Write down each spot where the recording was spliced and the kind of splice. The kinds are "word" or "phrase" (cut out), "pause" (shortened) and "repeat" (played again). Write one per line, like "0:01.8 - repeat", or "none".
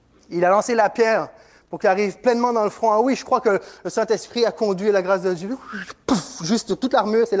none